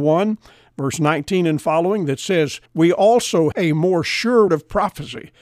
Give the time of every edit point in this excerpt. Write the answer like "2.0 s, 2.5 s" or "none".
2.7 s, 3.5 s, 4.5 s